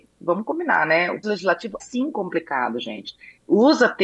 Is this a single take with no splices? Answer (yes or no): no